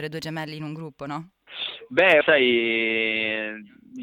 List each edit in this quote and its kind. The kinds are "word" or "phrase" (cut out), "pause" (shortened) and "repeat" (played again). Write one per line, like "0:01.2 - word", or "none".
0:02.2 - word

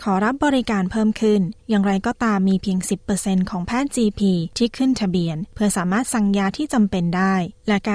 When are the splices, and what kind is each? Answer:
none

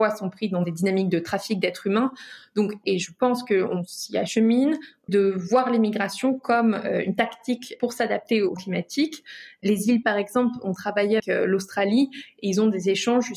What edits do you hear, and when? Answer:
0:02.8 - word
0:05.1 - word
0:08.6 - word
0:10.0 - word
0:11.2 - word

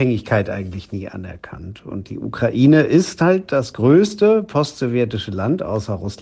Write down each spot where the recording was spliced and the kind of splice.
none

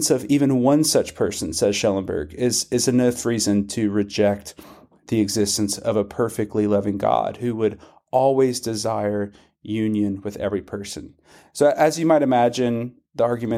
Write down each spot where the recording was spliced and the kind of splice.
none

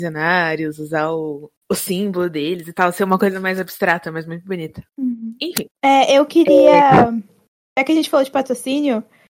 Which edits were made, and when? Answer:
0:01.6 - pause
0:04.9 - pause
0:05.7 - pause

